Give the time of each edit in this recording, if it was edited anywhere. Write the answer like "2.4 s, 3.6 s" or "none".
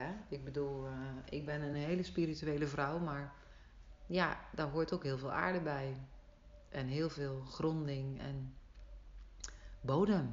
none